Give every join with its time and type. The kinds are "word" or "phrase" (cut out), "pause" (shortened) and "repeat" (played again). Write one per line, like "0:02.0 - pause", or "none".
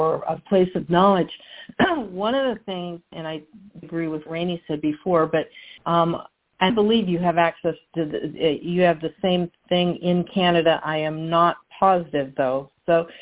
0:03.1 - word
0:03.8 - word
0:04.3 - word
0:05.8 - pause
0:06.7 - word